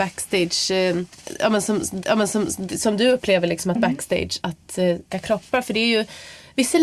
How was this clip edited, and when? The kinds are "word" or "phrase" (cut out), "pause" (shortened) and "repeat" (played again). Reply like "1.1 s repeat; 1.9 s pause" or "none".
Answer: 2.0 s repeat; 3.8 s word; 4.4 s word; 5.1 s phrase